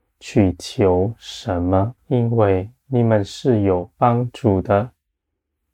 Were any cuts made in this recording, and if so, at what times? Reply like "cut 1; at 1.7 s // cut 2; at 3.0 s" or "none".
cut 1; at 2.0 s